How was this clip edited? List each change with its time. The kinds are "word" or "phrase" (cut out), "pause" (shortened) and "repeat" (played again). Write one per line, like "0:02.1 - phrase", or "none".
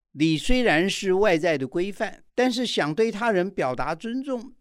0:02.3 - pause